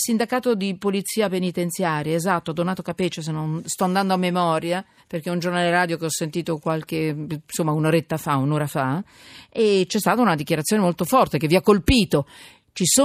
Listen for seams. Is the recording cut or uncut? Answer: cut